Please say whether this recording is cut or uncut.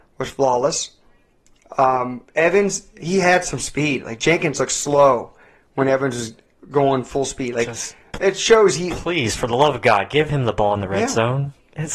uncut